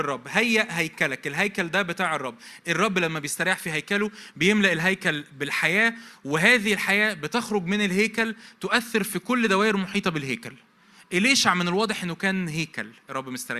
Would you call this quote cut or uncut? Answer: uncut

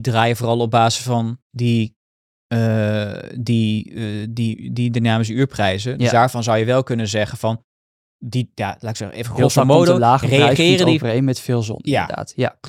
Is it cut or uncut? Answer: cut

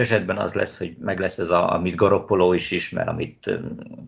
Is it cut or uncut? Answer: uncut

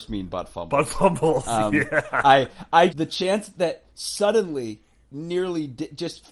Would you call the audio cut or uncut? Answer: cut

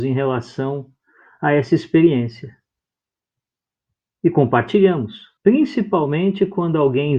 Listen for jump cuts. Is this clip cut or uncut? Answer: cut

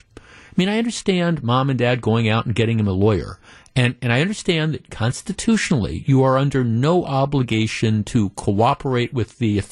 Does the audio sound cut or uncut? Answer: uncut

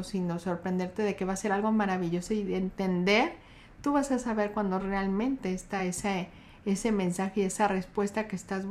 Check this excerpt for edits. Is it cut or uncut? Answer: uncut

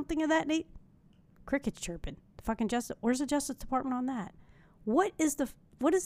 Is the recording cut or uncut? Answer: uncut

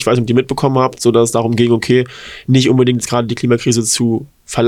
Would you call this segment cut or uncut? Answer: uncut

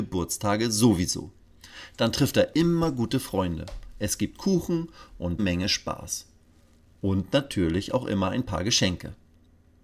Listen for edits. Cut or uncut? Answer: cut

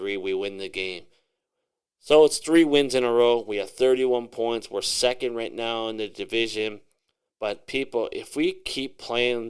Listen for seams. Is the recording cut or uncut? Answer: uncut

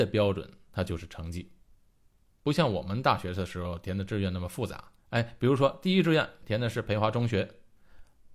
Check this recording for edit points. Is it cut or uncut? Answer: cut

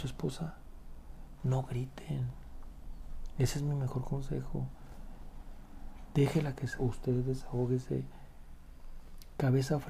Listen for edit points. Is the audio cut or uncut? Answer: cut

